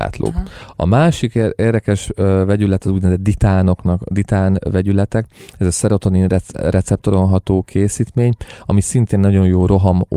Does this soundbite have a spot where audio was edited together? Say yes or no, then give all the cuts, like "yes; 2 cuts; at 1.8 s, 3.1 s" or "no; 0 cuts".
no; 0 cuts